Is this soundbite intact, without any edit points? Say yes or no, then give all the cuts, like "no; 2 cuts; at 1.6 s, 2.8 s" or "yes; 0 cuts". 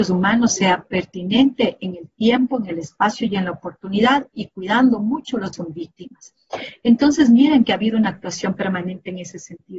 no; 1 cut; at 5.5 s